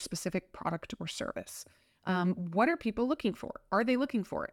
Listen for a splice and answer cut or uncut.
uncut